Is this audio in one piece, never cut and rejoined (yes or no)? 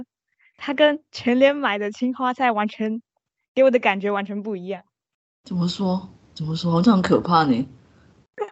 yes